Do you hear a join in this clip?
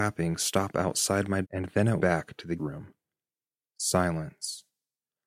yes; 3 cuts; at 1.4 s, 2.0 s, 2.6 s

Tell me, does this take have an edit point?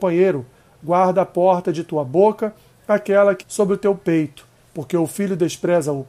yes; 1 cut; at 3.4 s

